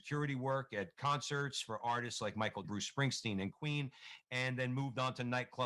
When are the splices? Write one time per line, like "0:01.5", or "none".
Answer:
0:02.6